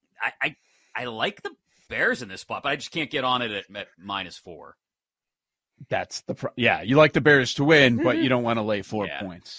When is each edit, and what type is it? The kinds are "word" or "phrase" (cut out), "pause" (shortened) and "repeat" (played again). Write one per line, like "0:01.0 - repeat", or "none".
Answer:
none